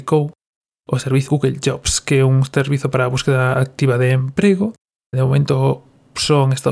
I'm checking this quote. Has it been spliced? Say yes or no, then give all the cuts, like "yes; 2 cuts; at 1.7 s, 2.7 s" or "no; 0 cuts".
yes; 2 cuts; at 1.3 s, 5.1 s